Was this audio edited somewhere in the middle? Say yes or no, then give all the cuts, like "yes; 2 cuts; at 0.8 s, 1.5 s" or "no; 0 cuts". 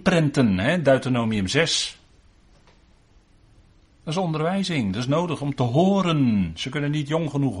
no; 0 cuts